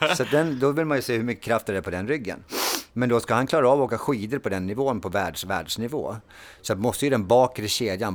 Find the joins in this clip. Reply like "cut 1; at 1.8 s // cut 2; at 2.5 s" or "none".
cut 1; at 2.9 s